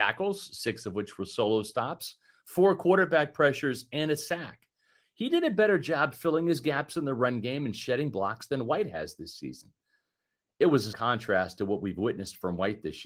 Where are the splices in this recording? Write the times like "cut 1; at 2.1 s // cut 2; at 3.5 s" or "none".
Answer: cut 1; at 10.9 s